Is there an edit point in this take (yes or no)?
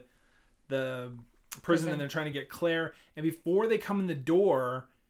no